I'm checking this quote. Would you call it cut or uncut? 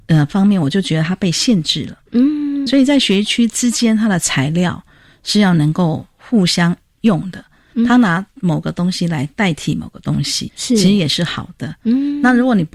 cut